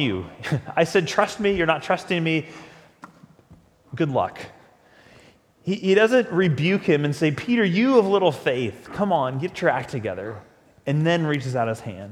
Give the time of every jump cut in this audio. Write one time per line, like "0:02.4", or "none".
none